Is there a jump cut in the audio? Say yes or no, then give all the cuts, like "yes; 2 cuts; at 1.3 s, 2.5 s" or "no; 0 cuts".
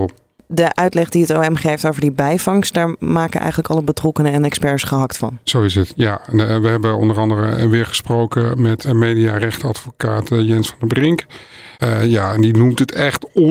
yes; 2 cuts; at 8.8 s, 11.7 s